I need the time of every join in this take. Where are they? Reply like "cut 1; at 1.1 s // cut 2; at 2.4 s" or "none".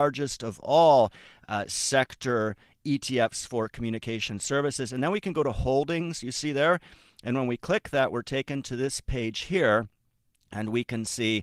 none